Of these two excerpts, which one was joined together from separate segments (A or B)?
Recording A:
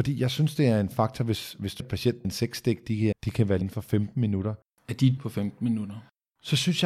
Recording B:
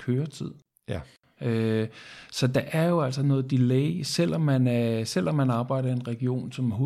A